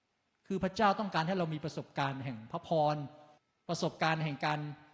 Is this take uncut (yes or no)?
no